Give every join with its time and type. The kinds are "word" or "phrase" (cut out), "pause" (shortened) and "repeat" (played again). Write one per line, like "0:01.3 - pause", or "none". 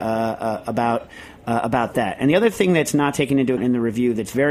0:03.6 - word